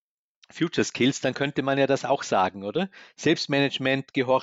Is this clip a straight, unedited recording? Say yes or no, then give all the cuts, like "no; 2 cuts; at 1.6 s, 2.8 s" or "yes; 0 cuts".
yes; 0 cuts